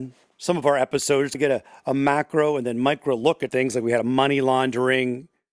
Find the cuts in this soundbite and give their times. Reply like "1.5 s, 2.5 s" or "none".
1.3 s, 3.5 s